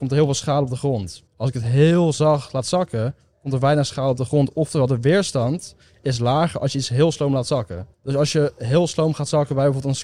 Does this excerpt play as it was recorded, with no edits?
no; 2 cuts; at 1.3 s, 7.9 s

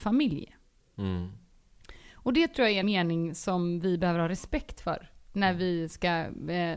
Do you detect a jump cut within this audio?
yes; 1 cut; at 2.8 s

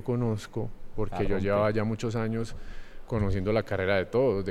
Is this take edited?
no; 0 cuts

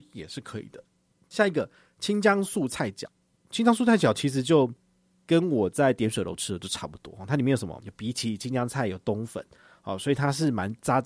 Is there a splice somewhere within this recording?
no; 0 cuts

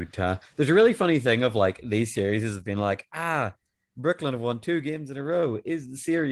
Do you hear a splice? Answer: no; 0 cuts

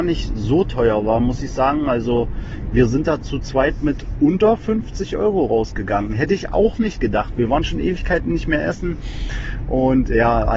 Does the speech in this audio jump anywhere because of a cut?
no; 0 cuts

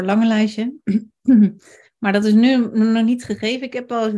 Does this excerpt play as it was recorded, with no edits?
yes; 0 cuts

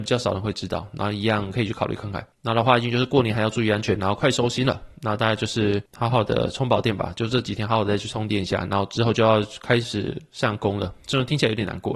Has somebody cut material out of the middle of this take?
yes; 1 cut; at 2.3 s

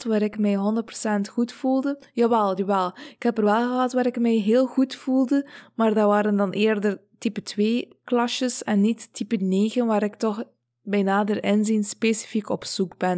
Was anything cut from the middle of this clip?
no; 0 cuts

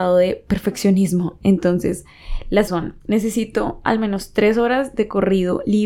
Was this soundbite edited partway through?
yes; 2 cuts; at 2.7 s, 3.0 s

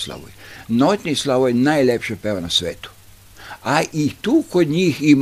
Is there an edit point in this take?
no; 0 cuts

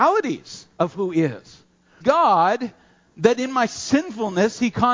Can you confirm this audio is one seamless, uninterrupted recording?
no; 1 cut; at 2.0 s

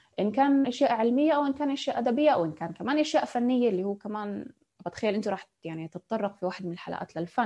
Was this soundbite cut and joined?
no; 0 cuts

